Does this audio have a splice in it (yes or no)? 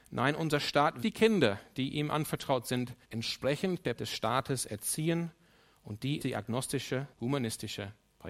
yes